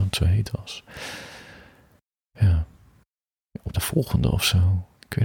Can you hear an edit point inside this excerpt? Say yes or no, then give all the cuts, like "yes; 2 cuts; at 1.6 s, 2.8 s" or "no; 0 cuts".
yes; 1 cut; at 3.7 s